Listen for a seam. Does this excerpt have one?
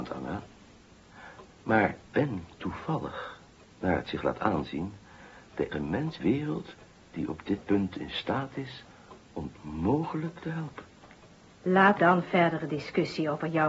yes; 6 cuts; at 2.1 s, 5.7 s, 6.2 s, 7.6 s, 9.6 s, 12.0 s

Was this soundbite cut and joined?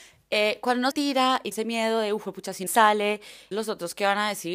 yes; 4 cuts; at 0.9 s, 1.5 s, 2.7 s, 3.5 s

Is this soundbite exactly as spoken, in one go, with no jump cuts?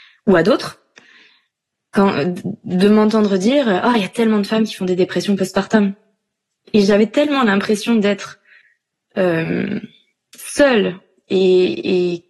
yes; 0 cuts

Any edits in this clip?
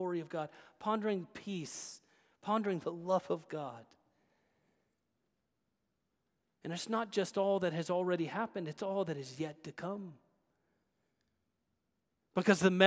no; 0 cuts

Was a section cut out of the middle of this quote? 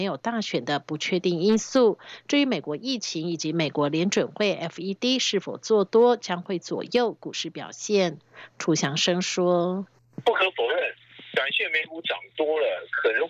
yes; 1 cut; at 9.9 s

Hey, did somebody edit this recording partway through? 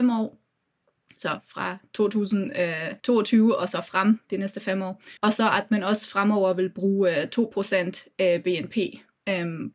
yes; 2 cuts; at 3.0 s, 5.2 s

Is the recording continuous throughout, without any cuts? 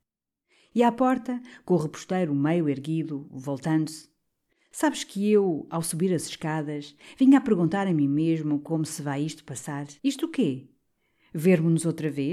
no; 1 cut; at 10.0 s

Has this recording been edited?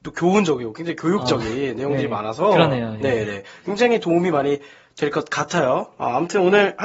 no; 0 cuts

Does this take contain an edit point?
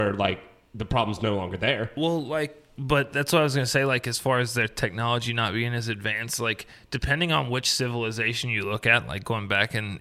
no; 0 cuts

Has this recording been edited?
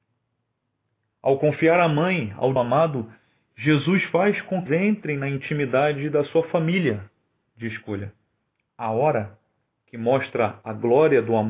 yes; 3 cuts; at 2.6 s, 4.7 s, 8.5 s

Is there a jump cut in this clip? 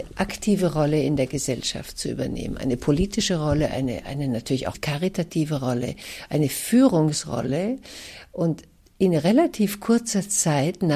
no; 0 cuts

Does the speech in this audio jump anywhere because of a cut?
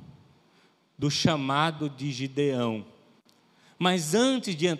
no; 0 cuts

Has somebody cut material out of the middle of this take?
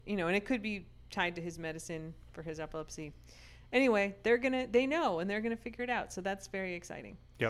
no; 0 cuts

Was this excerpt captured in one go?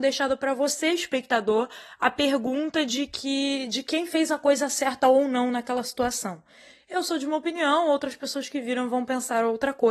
yes; 0 cuts

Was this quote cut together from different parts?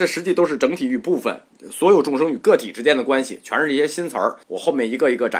yes; 1 cut; at 4.4 s

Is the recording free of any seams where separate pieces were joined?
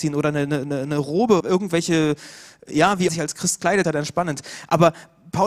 no; 3 cuts; at 1.4 s, 3.1 s, 3.8 s

